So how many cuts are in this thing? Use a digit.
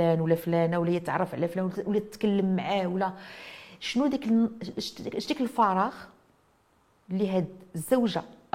0